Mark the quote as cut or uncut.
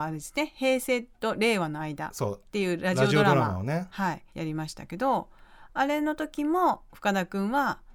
cut